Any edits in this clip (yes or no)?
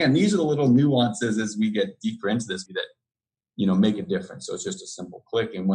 yes